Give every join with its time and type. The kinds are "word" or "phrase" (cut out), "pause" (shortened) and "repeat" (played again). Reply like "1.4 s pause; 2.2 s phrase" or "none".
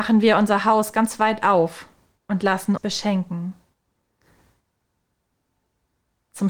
2.8 s word